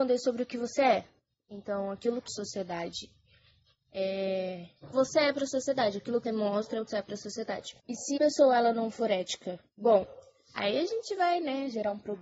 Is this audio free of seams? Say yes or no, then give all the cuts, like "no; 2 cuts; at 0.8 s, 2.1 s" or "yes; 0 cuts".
no; 7 cuts; at 2.3 s, 4.9 s, 6.2 s, 6.9 s, 7.8 s, 8.2 s, 9.7 s